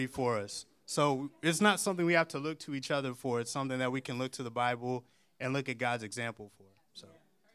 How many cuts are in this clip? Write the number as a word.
zero